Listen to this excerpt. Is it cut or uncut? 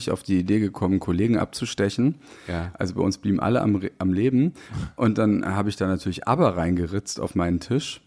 uncut